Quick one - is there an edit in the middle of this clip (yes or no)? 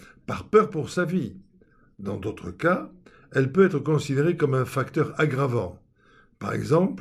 no